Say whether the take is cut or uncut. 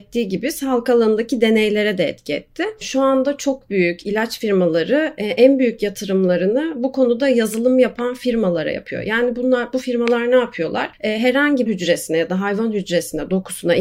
cut